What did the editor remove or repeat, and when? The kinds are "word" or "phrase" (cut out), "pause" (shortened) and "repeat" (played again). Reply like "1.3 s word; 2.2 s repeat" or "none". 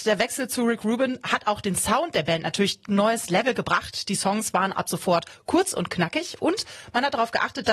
2.9 s phrase